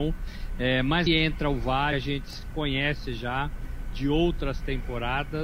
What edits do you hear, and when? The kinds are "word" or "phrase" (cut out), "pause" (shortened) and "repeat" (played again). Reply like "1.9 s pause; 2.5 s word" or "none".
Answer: 1.1 s word; 1.9 s word